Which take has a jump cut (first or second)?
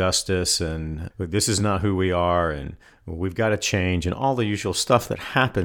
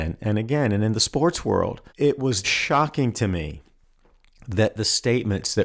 second